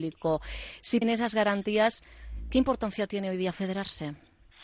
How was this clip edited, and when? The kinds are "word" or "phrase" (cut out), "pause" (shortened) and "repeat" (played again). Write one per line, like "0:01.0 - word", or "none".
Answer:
0:01.0 - phrase